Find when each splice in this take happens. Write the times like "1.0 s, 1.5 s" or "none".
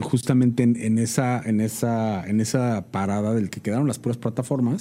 3.5 s